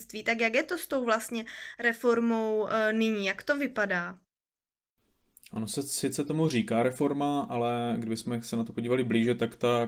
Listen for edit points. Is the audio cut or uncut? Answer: uncut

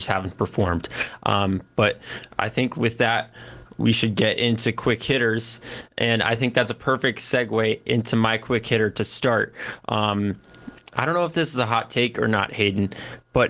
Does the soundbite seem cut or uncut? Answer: uncut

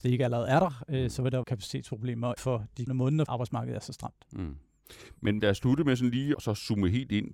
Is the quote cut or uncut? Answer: cut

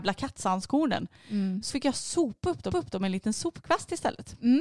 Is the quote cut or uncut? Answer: cut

